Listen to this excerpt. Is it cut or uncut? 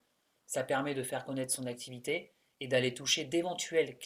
uncut